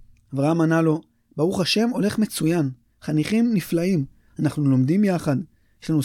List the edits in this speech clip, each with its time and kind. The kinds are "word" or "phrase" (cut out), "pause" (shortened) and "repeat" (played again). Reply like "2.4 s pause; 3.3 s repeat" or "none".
none